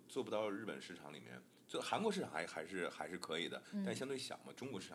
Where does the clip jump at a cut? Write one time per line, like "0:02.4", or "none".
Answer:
none